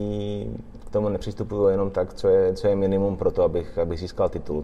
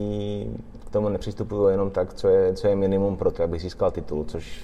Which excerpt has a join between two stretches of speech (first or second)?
second